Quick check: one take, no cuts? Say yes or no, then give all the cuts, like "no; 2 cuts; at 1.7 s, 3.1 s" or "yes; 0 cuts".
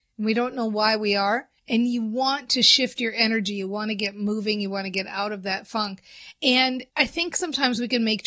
no; 2 cuts; at 1.6 s, 6.9 s